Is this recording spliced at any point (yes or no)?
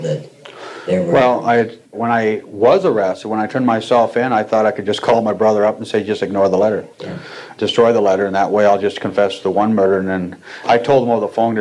yes